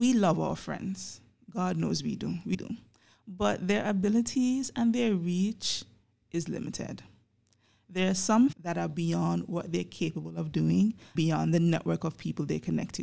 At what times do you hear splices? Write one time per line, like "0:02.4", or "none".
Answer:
0:02.5
0:08.5
0:11.1